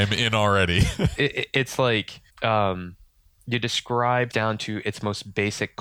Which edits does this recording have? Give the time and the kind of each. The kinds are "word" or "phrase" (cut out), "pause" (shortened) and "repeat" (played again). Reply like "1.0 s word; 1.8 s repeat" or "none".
1.1 s phrase; 2.3 s pause; 4.3 s word